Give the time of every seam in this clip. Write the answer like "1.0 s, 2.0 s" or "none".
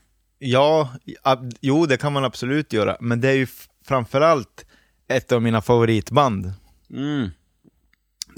none